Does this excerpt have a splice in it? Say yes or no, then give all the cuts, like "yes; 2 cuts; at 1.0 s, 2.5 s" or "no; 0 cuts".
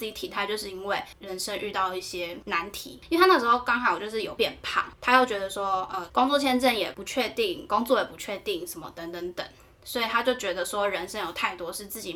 no; 0 cuts